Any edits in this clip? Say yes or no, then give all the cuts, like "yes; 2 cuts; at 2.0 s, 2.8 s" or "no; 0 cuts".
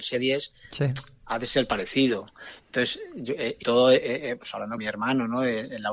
yes; 2 cuts; at 3.6 s, 4.8 s